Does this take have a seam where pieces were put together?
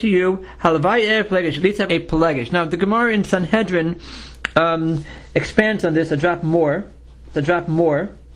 yes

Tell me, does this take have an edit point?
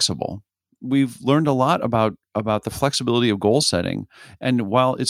no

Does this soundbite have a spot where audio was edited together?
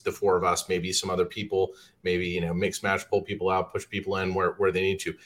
no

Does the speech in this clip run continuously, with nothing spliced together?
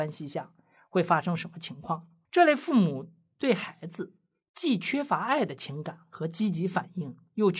yes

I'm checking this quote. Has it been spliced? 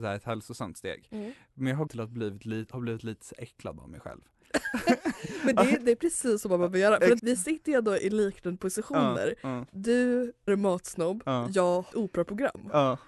yes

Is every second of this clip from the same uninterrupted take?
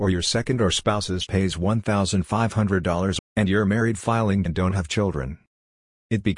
no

